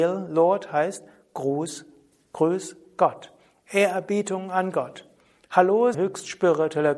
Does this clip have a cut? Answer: yes; 1 cut; at 5.9 s

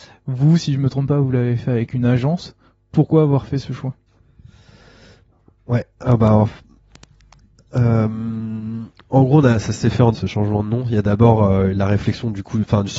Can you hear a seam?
yes; 1 cut; at 10.1 s

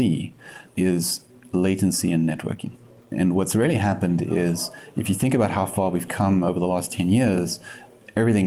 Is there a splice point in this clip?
no; 0 cuts

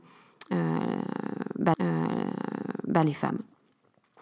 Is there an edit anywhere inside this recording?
yes; 1 cut; at 1.7 s

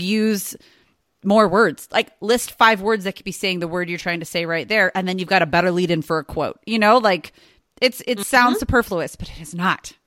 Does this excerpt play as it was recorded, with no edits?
yes; 0 cuts

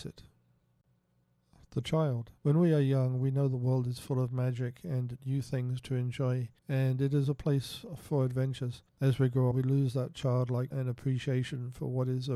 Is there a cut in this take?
yes; 5 cuts; at 2.4 s, 6.6 s, 8.9 s, 9.5 s, 10.7 s

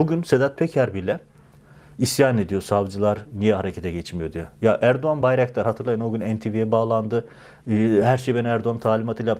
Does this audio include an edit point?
no; 0 cuts

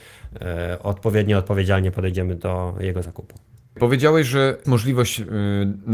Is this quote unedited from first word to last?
no; 1 cut; at 4.6 s

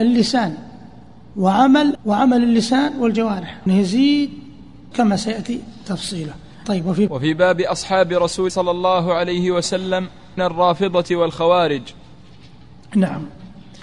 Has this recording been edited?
yes; 7 cuts; at 1.9 s, 3.7 s, 4.9 s, 6.6 s, 7.1 s, 8.5 s, 10.4 s

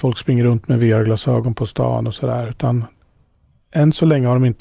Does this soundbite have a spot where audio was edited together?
no; 0 cuts

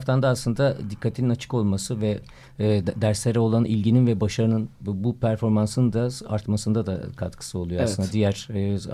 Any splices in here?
no; 0 cuts

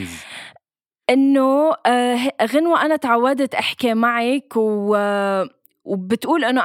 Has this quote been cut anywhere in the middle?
no; 0 cuts

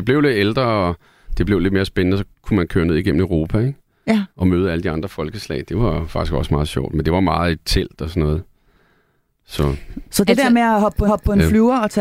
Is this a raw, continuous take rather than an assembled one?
no; 3 cuts; at 2.3 s, 4.3 s, 11.1 s

